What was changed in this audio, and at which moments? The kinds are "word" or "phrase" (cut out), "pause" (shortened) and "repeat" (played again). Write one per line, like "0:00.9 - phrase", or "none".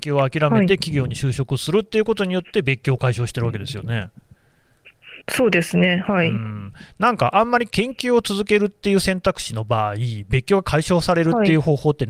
0:05.2 - pause